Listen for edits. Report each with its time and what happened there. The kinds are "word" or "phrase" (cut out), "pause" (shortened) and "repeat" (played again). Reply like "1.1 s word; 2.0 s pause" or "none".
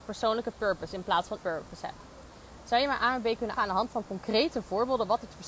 1.4 s word; 3.6 s word